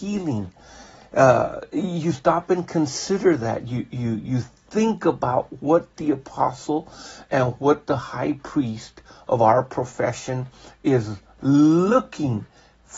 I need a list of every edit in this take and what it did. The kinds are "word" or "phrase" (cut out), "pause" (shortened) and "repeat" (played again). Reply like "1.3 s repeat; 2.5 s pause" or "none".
none